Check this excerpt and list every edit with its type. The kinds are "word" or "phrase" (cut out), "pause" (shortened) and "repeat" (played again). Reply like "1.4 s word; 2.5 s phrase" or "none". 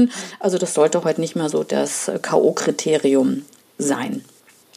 none